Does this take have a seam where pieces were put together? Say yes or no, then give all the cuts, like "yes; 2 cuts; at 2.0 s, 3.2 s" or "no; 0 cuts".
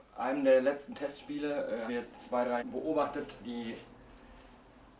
yes; 3 cuts; at 1.9 s, 2.6 s, 3.4 s